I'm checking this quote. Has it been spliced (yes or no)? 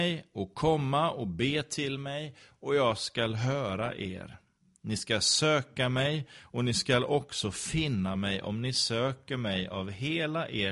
no